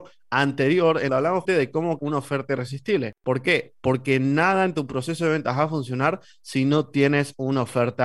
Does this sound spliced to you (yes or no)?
yes